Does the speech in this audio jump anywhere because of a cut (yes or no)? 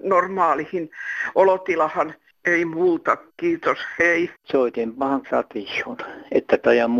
yes